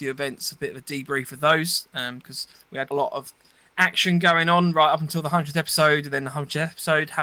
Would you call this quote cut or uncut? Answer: cut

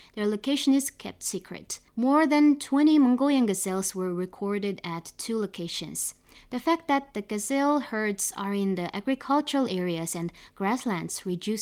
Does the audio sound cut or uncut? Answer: cut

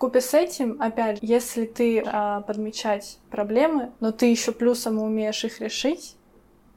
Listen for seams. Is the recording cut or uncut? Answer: cut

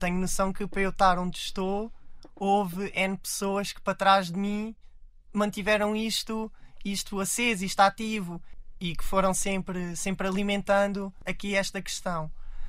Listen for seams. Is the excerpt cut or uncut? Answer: uncut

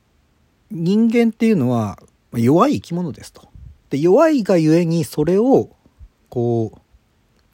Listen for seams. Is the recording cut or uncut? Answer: uncut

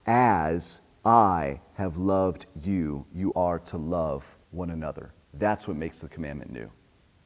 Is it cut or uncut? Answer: cut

